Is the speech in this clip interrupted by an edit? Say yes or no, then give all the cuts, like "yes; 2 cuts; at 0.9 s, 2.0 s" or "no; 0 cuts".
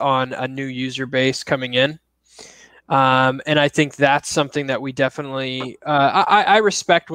no; 0 cuts